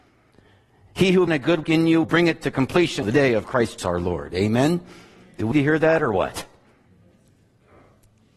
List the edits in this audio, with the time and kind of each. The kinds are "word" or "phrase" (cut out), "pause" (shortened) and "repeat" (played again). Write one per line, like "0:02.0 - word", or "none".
0:01.3 - word
0:01.6 - word
0:02.0 - word
0:03.0 - word
0:03.8 - word
0:05.5 - word